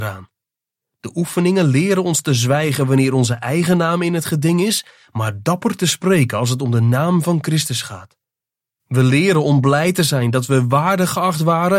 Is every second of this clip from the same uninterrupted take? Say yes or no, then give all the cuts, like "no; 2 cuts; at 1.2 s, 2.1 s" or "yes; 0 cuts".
yes; 0 cuts